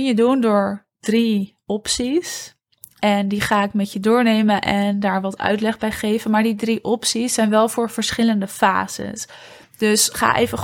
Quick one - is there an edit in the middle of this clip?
no; 0 cuts

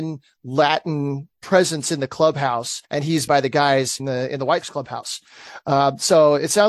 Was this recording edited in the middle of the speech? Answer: yes; 5 cuts; at 1.3 s, 2.8 s, 3.3 s, 4.0 s, 4.6 s

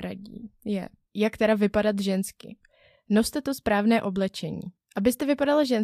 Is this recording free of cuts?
yes; 0 cuts

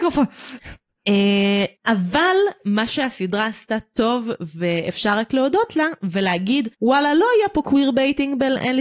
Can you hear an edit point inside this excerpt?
yes; 2 cuts; at 1.8 s, 6.7 s

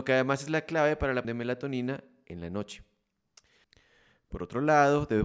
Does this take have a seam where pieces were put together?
yes; 1 cut; at 1.2 s

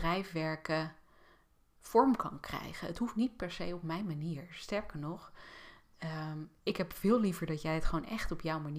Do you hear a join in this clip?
no; 0 cuts

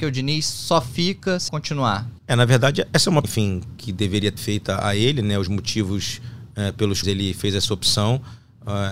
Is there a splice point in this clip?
yes; 5 cuts; at 1.5 s, 2.2 s, 3.2 s, 4.4 s, 7.0 s

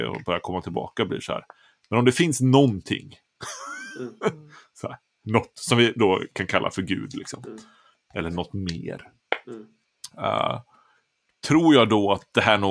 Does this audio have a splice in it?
no; 0 cuts

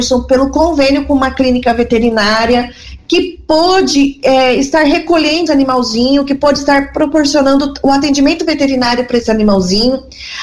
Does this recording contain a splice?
yes; 1 cut; at 5.5 s

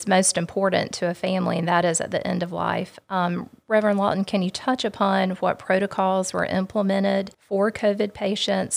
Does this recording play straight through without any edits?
no; 1 cut; at 7.3 s

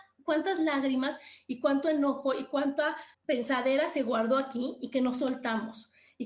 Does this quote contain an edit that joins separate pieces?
yes; 1 cut; at 3.1 s

